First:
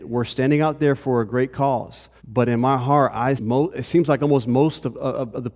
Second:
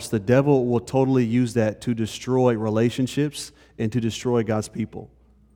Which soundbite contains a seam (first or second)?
first